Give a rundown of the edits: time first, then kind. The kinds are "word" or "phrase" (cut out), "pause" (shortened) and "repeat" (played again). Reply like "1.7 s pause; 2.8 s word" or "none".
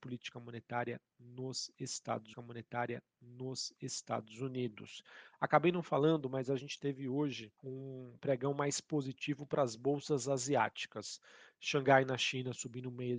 2.3 s repeat; 7.6 s pause